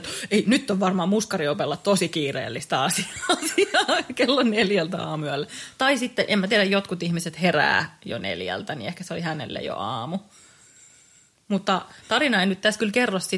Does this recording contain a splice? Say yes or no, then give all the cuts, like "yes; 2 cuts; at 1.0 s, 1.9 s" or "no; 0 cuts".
no; 0 cuts